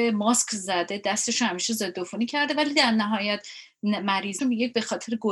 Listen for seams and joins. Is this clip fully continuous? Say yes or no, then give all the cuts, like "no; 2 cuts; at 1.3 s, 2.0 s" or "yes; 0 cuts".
no; 1 cut; at 4.4 s